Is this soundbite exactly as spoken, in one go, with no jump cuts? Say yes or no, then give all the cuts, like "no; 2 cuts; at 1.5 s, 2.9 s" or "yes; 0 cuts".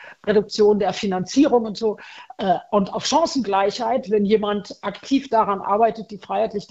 yes; 0 cuts